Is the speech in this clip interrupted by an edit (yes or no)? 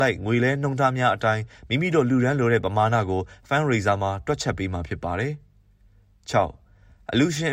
no